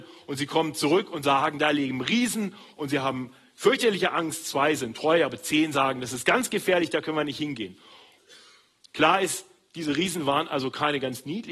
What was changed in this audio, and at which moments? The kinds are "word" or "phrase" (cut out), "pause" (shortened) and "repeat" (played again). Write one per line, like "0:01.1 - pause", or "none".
none

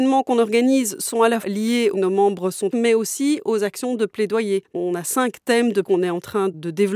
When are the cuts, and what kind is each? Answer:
0:01.4 - word
0:01.9 - phrase
0:02.7 - word
0:05.8 - word

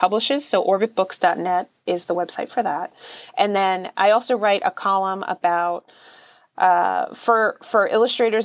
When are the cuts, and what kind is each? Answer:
none

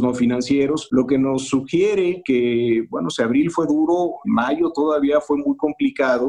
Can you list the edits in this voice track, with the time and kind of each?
0:04.2 - word

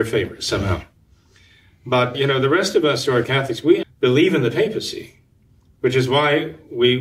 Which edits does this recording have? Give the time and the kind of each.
0:02.1 - word
0:03.2 - word
0:03.8 - word

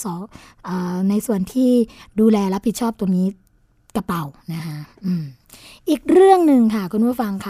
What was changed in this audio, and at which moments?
none

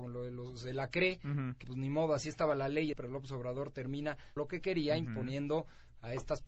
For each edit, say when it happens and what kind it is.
0:01.6 - word
0:02.9 - phrase
0:04.4 - word

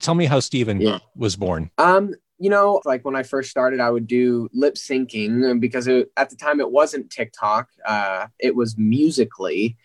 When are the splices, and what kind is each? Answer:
0:01.7 - pause
0:02.8 - phrase

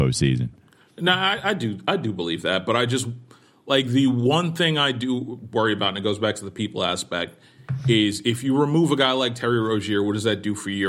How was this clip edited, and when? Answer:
none

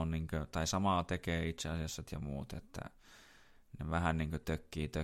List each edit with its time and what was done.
0:02.0 - phrase

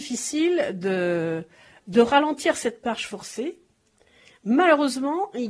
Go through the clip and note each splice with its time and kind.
none

